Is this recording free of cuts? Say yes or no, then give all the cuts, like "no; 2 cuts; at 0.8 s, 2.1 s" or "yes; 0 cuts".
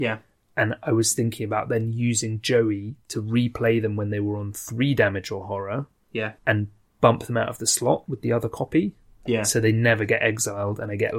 no; 1 cut; at 6.4 s